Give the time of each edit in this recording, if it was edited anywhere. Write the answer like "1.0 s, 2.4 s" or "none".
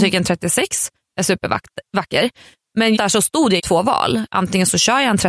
3.0 s, 3.6 s

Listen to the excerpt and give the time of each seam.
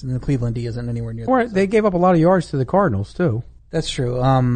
1.3 s, 3.6 s

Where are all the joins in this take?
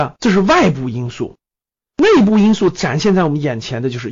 none

